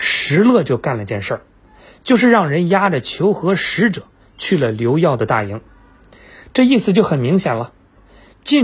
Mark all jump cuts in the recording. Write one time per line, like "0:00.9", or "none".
none